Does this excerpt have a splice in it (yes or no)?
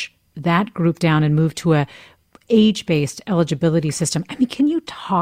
no